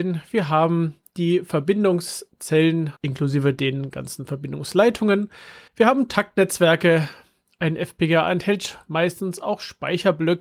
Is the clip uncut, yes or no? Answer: no